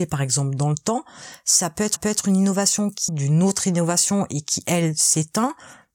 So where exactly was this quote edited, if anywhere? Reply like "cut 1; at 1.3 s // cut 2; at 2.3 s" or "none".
cut 1; at 2.0 s // cut 2; at 3.1 s

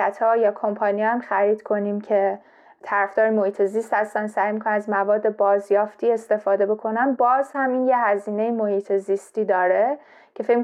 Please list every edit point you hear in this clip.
none

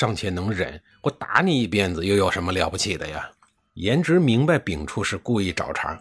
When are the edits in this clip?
none

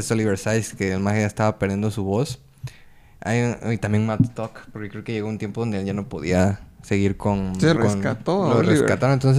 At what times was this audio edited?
cut 1; at 7.7 s

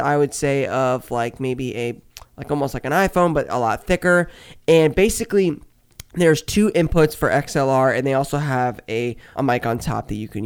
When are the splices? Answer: cut 1; at 9.4 s

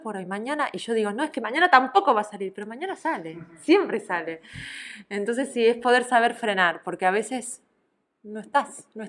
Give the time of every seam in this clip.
none

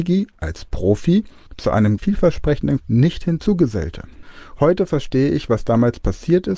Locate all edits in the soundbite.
cut 1; at 2.0 s // cut 2; at 2.8 s

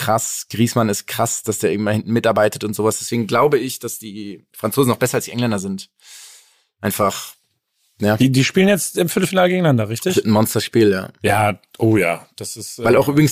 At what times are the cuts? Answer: cut 1; at 4.5 s

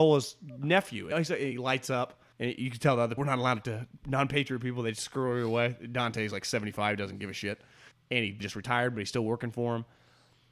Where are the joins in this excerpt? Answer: cut 1; at 1.1 s // cut 2; at 2.3 s // cut 3; at 3.2 s // cut 4; at 3.6 s // cut 5; at 7.9 s // cut 6; at 8.4 s

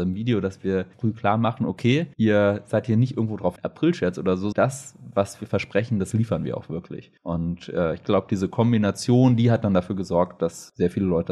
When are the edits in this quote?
cut 1; at 0.9 s // cut 2; at 2.1 s // cut 3; at 3.6 s // cut 4; at 4.5 s // cut 5; at 7.2 s

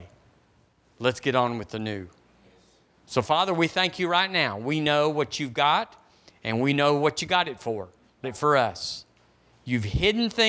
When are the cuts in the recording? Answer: cut 1; at 8.2 s

